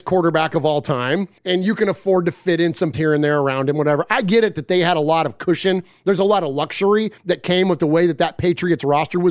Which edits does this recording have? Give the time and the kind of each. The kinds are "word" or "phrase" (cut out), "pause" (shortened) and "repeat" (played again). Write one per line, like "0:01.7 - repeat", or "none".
0:01.4 - pause
0:02.9 - word
0:07.2 - pause

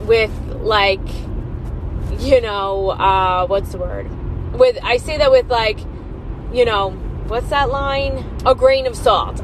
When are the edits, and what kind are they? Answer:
0:07.2 - word
0:08.4 - word

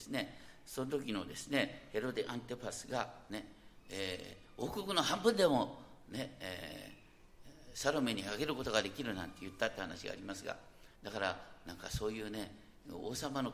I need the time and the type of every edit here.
0:10.9 - pause

